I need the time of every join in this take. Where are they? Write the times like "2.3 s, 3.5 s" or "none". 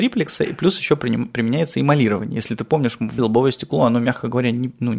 3.2 s